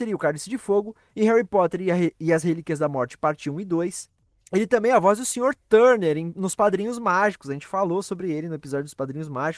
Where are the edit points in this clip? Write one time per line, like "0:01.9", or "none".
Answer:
none